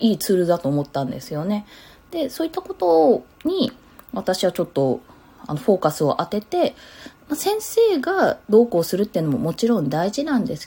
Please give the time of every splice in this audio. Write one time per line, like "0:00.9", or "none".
none

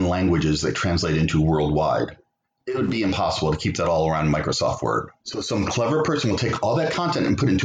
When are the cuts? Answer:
none

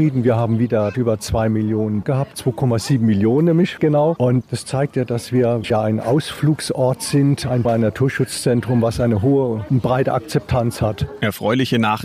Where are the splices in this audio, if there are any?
0:00.9
0:02.0
0:03.8
0:04.4
0:05.6
0:07.6

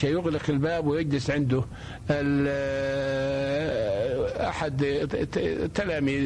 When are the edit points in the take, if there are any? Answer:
none

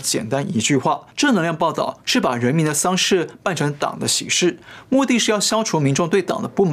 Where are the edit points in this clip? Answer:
0:01.1

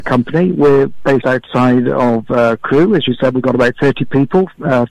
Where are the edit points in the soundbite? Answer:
0:01.2

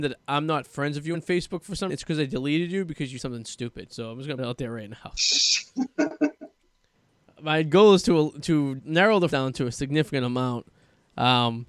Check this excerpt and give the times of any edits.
0:01.1
0:01.9
0:03.2
0:04.4
0:08.8
0:09.3

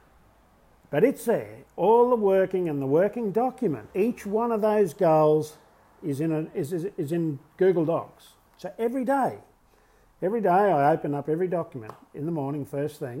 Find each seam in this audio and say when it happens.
0:03.9

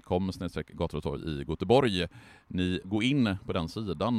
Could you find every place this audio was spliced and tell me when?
0:02.8

